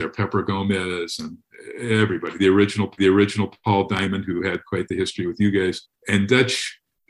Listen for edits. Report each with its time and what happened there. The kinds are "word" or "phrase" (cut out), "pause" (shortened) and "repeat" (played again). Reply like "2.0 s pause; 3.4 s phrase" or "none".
3.0 s repeat; 5.9 s pause

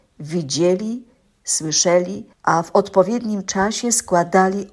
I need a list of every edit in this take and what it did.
2.3 s pause

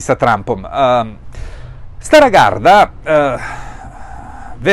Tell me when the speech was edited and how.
none

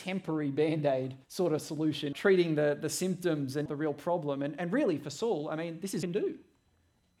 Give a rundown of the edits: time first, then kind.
1.2 s pause; 2.1 s phrase; 3.7 s word; 6.0 s phrase

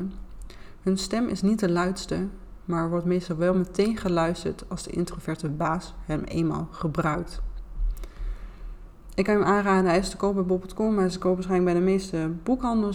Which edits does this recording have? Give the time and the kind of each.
none

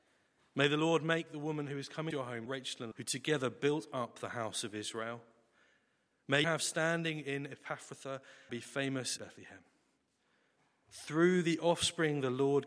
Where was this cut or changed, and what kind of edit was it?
2.1 s word; 2.5 s word; 2.9 s word; 6.4 s word; 8.5 s word; 9.2 s word

